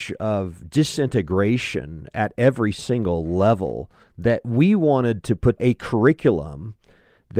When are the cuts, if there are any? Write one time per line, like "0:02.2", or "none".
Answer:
0:04.0
0:05.6